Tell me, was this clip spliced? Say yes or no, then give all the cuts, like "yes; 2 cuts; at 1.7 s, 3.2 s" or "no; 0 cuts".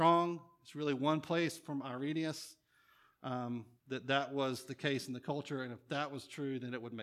yes; 1 cut; at 3.8 s